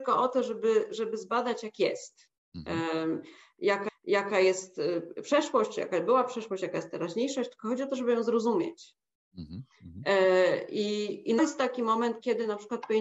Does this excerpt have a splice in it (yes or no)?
yes